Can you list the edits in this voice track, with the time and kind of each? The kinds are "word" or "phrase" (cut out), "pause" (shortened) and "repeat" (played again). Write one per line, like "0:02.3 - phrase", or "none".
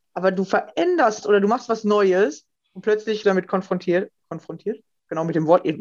0:01.2 - word
0:03.2 - word